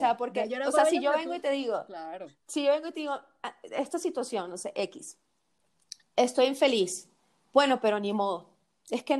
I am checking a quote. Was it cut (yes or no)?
no